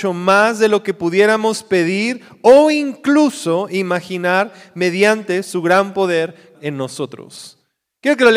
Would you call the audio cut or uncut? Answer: cut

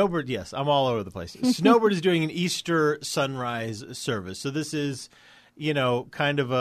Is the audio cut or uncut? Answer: uncut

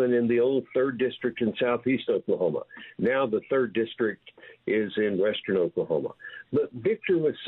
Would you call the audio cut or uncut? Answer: uncut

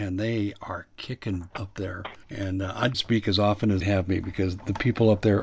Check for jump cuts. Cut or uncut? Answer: cut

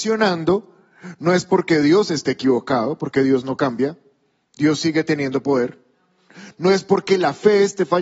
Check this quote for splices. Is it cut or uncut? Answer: uncut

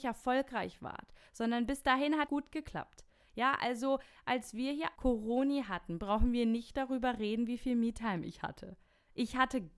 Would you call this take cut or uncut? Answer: cut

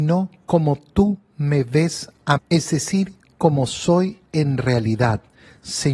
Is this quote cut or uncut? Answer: cut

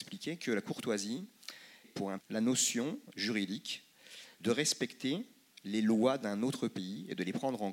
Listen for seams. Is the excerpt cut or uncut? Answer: cut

